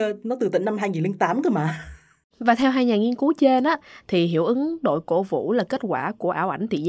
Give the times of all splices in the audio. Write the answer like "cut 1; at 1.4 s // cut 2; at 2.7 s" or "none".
none